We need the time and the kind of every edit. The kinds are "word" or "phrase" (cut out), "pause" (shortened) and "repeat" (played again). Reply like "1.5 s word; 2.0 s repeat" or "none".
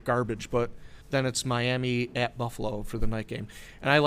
1.0 s pause